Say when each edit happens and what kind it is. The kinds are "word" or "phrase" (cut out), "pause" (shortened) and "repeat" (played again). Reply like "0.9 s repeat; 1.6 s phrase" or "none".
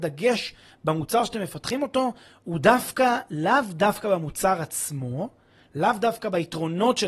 none